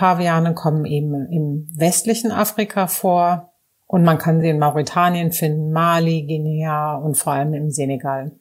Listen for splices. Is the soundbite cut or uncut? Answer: uncut